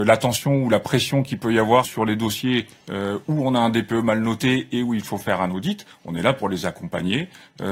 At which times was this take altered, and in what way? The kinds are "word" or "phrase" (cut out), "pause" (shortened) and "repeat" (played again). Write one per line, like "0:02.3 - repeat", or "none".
0:01.8 - word